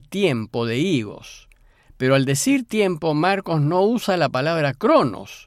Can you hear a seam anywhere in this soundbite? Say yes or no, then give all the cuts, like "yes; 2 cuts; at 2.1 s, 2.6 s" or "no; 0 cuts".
no; 0 cuts